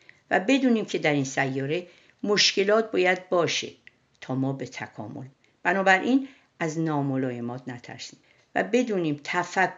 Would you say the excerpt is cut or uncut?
uncut